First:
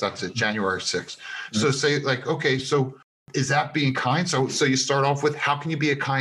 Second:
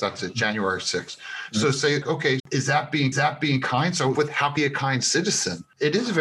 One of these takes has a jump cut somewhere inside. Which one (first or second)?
second